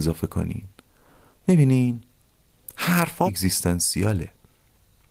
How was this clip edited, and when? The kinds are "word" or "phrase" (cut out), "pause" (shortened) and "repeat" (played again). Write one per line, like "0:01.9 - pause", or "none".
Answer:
0:03.3 - word